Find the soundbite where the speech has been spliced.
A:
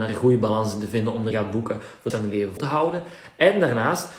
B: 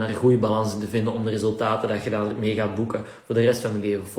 A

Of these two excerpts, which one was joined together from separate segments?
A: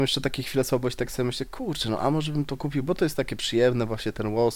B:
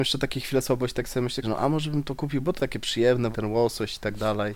B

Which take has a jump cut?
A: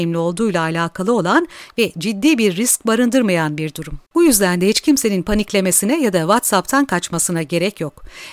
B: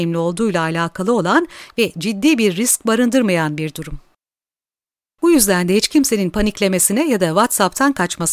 A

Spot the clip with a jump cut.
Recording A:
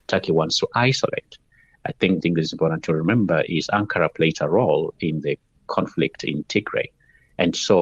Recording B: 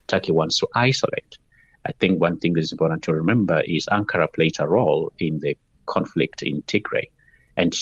A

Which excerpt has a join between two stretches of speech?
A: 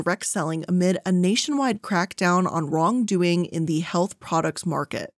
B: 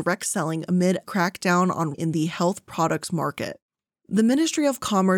B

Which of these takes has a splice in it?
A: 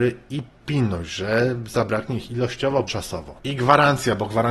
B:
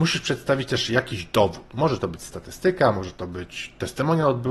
A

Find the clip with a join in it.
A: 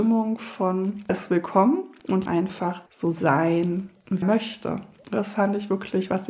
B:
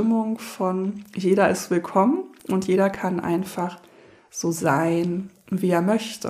A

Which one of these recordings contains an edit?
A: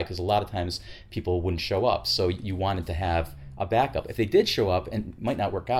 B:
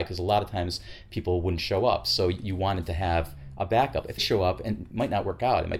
B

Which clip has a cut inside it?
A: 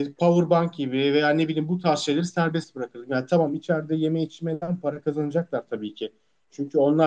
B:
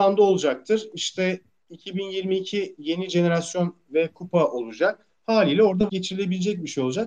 B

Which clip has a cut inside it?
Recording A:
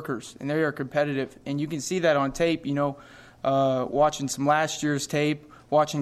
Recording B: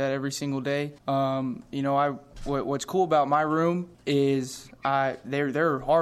B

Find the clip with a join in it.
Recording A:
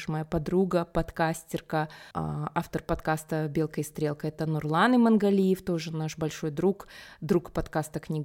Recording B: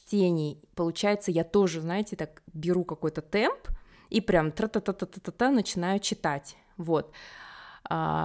A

